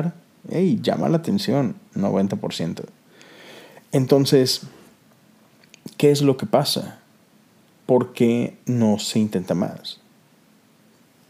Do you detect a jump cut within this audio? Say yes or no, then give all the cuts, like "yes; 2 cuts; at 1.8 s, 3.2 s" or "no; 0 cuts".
yes; 1 cut; at 8.6 s